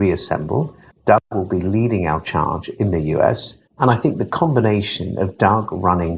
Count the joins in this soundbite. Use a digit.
2